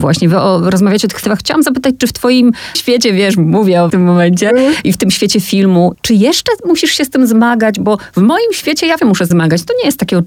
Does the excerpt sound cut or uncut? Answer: cut